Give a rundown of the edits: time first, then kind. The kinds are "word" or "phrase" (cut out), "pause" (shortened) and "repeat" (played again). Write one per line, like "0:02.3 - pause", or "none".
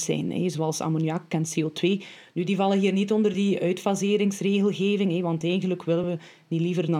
none